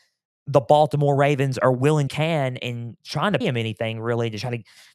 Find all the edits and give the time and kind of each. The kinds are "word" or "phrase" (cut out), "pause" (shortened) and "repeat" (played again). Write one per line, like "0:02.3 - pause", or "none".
0:02.1 - phrase
0:03.0 - pause
0:03.4 - word